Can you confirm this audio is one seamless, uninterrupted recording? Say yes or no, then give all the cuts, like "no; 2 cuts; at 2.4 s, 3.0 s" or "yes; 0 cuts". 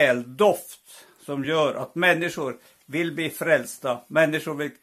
yes; 0 cuts